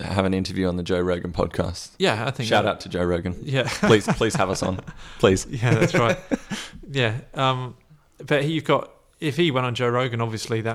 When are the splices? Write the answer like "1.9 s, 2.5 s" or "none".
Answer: none

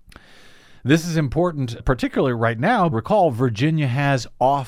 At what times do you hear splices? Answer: 1.8 s, 2.9 s

